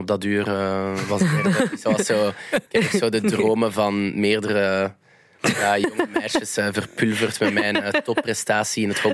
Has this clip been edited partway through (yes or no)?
yes